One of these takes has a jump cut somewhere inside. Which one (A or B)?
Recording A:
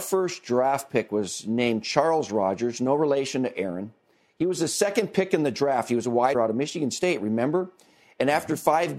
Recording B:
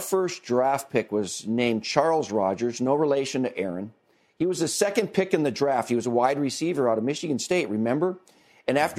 A